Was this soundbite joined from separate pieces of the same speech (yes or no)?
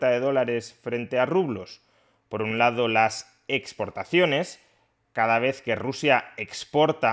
no